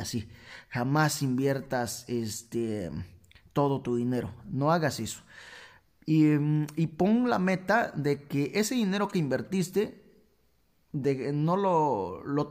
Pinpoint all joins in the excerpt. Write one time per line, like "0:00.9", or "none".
none